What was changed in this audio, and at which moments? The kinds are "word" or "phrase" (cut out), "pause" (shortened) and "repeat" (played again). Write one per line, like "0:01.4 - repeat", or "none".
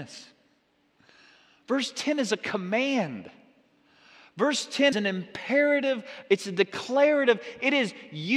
0:04.9 - word